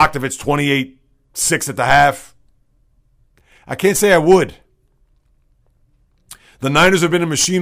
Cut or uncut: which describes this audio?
uncut